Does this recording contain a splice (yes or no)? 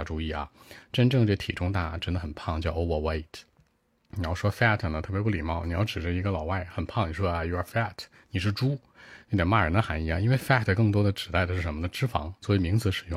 no